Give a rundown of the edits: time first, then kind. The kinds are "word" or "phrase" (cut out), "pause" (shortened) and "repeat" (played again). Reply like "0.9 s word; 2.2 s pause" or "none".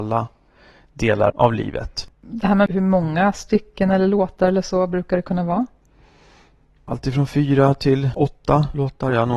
1.3 s word; 2.1 s pause; 2.7 s word